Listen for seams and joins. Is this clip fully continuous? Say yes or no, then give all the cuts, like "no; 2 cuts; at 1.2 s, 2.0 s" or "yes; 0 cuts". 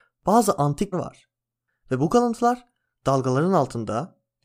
no; 1 cut; at 0.9 s